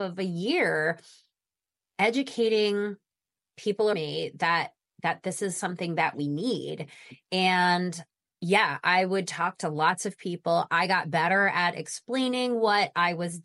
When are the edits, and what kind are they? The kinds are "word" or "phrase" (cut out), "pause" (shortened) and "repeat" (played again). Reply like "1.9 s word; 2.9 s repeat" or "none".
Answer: 3.9 s word